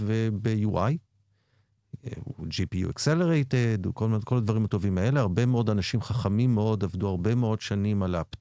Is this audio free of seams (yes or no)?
yes